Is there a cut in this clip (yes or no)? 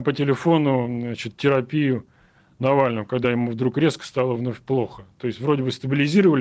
no